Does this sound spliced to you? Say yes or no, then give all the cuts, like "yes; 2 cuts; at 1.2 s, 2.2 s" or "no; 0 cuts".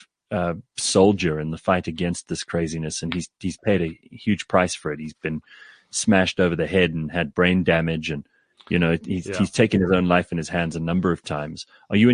no; 0 cuts